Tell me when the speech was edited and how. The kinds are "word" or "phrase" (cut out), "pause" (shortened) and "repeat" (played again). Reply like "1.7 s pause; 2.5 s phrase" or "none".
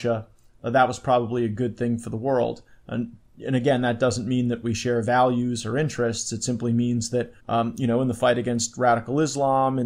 7.4 s pause